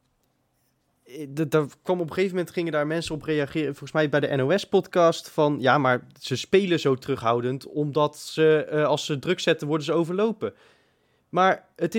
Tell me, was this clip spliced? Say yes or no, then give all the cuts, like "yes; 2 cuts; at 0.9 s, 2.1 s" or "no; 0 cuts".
no; 0 cuts